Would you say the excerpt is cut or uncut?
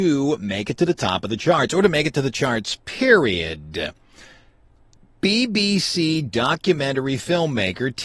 uncut